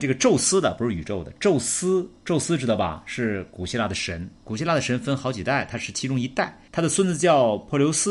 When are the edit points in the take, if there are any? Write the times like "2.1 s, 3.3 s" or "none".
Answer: 6.7 s